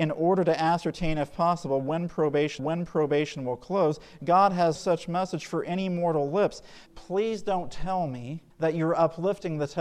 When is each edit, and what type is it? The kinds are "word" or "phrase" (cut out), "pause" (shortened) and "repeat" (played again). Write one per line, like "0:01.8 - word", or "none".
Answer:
0:02.6 - repeat
0:04.8 - word
0:06.9 - word
0:08.5 - pause